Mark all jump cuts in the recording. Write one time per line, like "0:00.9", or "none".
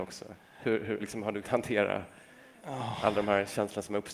0:01.0
0:01.4